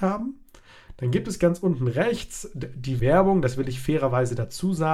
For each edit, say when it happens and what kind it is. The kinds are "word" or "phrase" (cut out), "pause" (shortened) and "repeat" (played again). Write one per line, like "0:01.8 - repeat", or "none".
0:03.0 - phrase